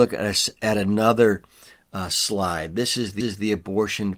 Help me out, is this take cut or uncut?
cut